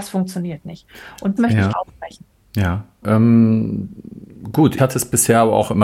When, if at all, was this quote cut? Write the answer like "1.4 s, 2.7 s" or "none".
1.4 s, 1.7 s, 3.0 s, 4.8 s